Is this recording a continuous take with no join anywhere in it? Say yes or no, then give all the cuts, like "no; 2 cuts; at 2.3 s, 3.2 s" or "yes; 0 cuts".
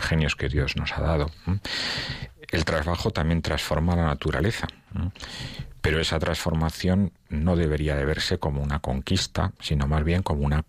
yes; 0 cuts